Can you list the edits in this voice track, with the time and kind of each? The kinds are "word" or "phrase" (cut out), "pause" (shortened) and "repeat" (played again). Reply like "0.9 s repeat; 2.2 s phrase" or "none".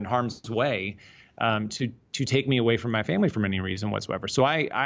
none